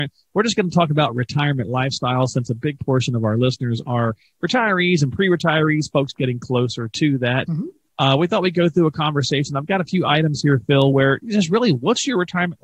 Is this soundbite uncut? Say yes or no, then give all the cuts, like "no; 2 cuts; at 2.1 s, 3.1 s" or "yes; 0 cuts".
yes; 0 cuts